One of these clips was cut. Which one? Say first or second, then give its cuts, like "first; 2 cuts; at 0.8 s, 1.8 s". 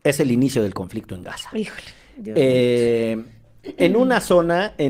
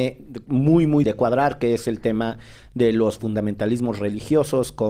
second; 1 cut; at 1.0 s